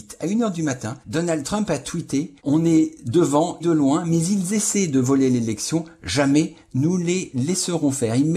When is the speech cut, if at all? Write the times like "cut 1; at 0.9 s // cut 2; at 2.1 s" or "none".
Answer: cut 1; at 1.0 s // cut 2; at 2.4 s // cut 3; at 3.6 s